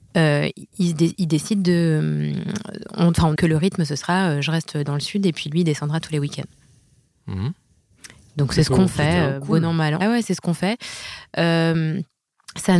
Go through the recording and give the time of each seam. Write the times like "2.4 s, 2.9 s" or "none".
3.4 s, 10.0 s